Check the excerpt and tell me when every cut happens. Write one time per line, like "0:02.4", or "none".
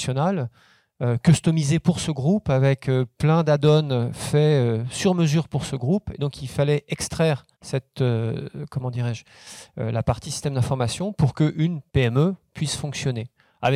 0:07.5
0:11.9